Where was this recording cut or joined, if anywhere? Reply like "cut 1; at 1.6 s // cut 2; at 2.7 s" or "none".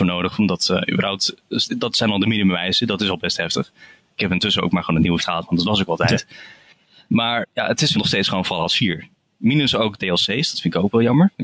cut 1; at 5.2 s // cut 2; at 7.4 s // cut 3; at 7.9 s // cut 4; at 10.0 s